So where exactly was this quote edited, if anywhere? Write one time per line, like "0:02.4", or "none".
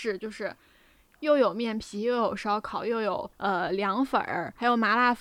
0:03.3

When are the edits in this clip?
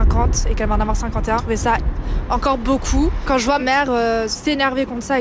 0:01.4
0:03.6

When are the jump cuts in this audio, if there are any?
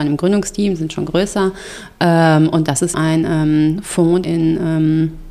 0:02.9
0:04.2

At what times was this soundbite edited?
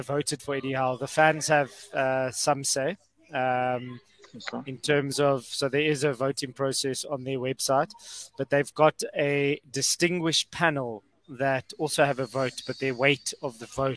none

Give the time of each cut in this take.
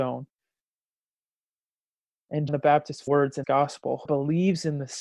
0:02.5
0:03.1
0:03.4
0:04.1

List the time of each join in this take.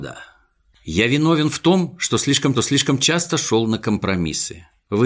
0:02.5

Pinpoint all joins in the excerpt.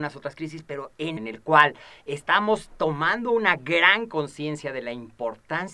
0:01.2

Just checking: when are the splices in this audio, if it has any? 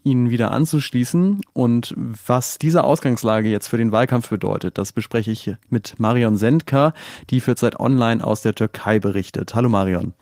none

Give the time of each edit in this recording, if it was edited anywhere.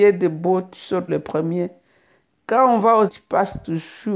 0:01.1
0:03.1

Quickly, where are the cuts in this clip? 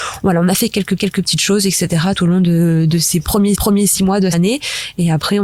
0:01.0
0:02.2
0:03.5
0:04.3

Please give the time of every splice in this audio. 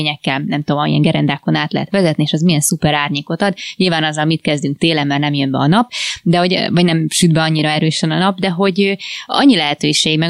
none

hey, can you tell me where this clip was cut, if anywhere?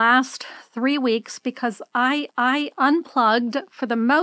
0:02.3

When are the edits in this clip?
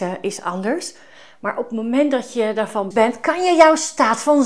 0:02.9

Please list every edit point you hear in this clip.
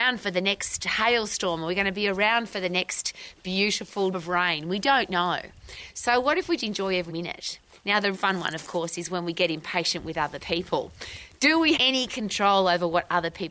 0:04.1
0:06.6
0:07.1
0:08.1
0:11.7

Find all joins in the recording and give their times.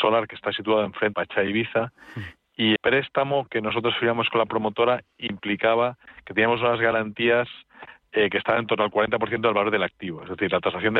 0:01.1
0:02.8

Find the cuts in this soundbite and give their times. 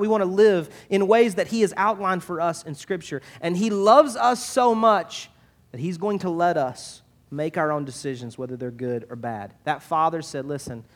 none

